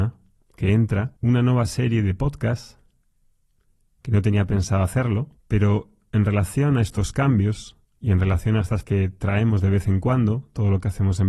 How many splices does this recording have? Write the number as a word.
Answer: four